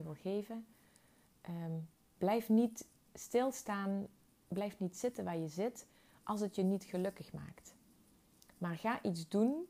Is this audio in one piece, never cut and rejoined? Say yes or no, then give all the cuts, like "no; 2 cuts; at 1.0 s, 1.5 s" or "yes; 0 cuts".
yes; 0 cuts